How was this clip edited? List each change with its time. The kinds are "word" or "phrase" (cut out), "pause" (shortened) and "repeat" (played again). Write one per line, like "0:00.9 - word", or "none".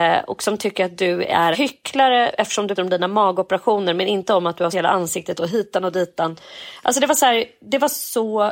0:01.5 - word
0:02.8 - word
0:04.7 - word
0:05.4 - word